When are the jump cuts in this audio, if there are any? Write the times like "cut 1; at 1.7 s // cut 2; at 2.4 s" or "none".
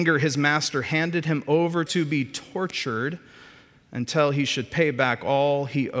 cut 1; at 1.9 s